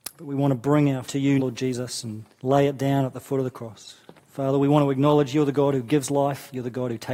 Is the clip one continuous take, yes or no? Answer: no